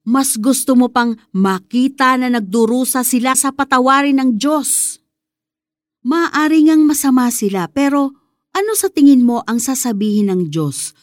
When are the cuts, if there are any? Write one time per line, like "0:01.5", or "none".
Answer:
0:03.3